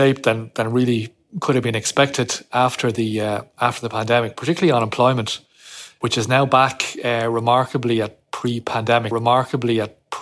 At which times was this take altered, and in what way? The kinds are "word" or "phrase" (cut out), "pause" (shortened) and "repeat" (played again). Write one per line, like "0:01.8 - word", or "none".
0:09.1 - repeat